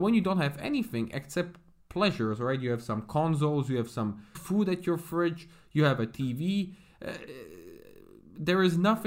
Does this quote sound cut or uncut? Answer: cut